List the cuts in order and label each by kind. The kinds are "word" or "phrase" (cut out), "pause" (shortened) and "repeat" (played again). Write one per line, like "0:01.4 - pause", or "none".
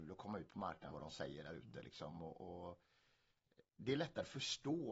0:00.9 - phrase